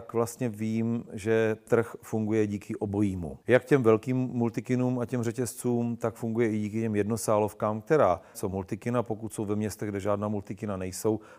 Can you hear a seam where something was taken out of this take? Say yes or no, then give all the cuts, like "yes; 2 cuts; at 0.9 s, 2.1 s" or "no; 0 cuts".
yes; 3 cuts; at 1.7 s, 3.4 s, 8.3 s